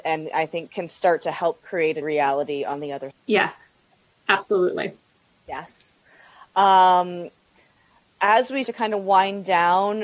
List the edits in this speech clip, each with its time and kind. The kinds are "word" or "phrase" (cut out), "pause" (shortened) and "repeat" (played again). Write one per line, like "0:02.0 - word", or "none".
0:02.0 - word
0:03.1 - word
0:08.6 - word